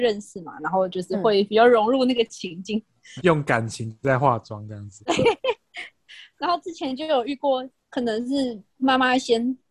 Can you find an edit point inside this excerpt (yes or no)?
yes